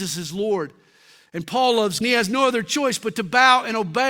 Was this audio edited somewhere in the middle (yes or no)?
yes